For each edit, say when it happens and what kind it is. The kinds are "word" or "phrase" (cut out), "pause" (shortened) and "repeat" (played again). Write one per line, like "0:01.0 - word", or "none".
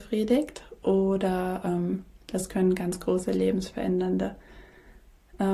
none